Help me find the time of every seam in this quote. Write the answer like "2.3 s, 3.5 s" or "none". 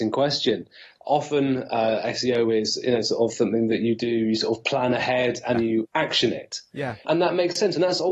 5.5 s, 7.0 s